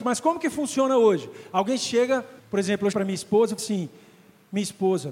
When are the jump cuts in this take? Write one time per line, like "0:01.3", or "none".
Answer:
0:02.4
0:02.9
0:03.6